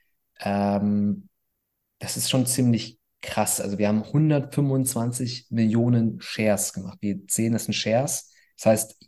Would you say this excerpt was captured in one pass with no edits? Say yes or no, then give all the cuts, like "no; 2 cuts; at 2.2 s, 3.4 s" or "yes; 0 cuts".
yes; 0 cuts